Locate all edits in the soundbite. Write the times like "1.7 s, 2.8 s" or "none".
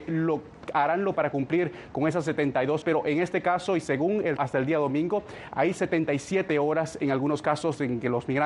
1.1 s, 2.8 s, 4.4 s